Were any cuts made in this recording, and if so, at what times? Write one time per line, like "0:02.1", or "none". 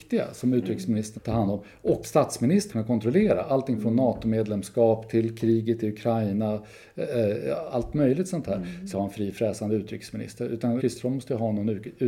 0:01.2
0:02.0
0:02.7
0:08.9
0:10.8